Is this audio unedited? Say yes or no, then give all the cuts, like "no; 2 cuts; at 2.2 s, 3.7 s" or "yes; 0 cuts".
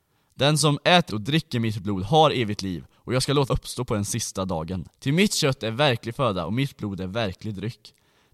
no; 3 cuts; at 1.1 s, 3.5 s, 5.0 s